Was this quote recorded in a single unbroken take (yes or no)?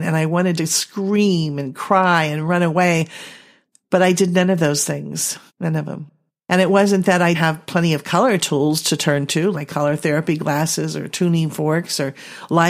no